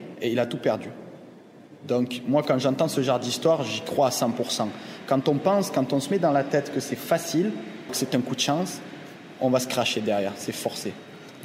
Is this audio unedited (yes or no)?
no